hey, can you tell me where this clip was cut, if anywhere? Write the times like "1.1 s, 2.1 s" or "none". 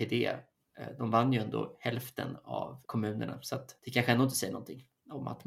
2.8 s, 3.8 s